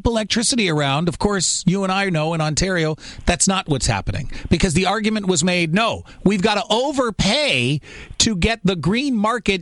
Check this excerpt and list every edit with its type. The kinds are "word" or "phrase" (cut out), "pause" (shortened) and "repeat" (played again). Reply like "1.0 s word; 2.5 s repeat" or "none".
none